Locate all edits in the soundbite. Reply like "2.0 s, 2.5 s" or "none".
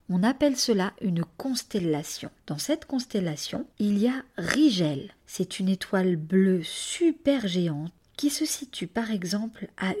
2.4 s, 3.7 s, 5.2 s